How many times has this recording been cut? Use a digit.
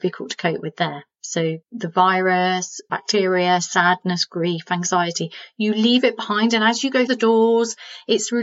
3